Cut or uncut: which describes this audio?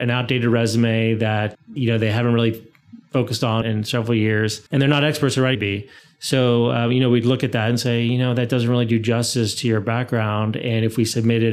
cut